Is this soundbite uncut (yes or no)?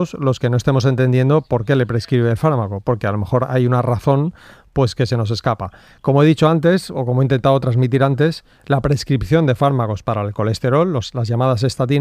yes